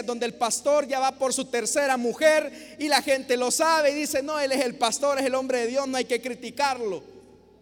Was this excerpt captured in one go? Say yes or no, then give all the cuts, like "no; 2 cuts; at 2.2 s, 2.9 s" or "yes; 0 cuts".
yes; 0 cuts